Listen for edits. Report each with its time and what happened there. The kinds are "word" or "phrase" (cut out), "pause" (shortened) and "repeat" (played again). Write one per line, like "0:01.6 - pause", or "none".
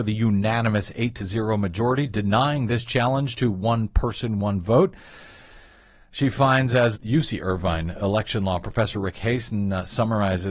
none